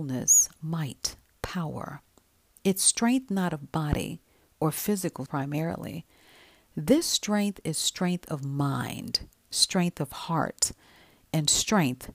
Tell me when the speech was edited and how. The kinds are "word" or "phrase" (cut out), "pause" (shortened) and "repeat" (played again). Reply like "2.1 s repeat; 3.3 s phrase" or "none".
5.3 s word